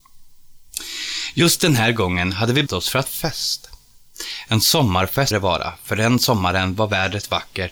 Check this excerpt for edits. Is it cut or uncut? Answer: cut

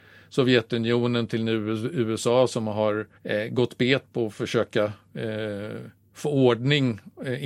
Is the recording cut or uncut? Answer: cut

